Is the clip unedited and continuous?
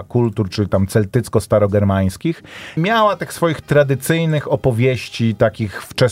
no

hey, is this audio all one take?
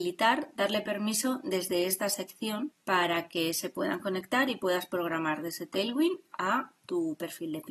yes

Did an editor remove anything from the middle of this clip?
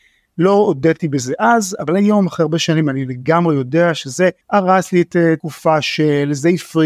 yes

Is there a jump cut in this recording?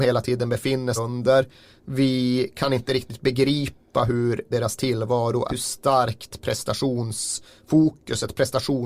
yes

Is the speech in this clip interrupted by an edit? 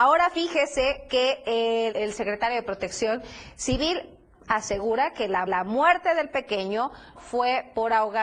yes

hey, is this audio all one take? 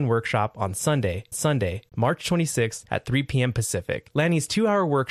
no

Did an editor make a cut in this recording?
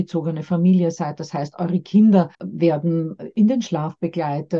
yes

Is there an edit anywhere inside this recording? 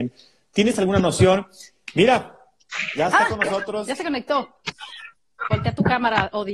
no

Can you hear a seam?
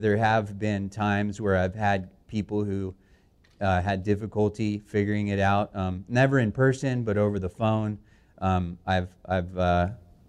no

